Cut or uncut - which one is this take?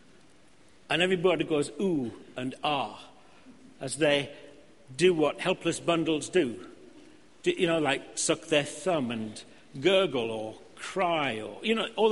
uncut